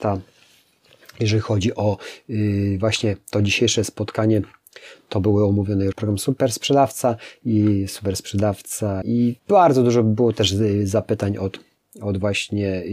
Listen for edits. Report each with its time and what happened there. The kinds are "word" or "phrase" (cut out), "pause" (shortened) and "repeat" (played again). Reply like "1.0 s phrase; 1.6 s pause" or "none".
5.9 s word; 9.0 s word; 9.4 s pause